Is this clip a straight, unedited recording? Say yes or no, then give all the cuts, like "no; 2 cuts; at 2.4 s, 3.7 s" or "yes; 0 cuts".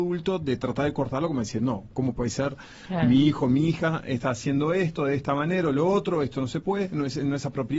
yes; 0 cuts